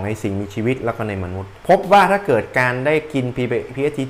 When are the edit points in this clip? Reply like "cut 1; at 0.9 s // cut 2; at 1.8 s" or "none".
cut 1; at 1.6 s